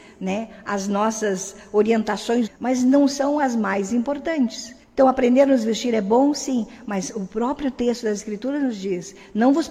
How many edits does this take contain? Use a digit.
2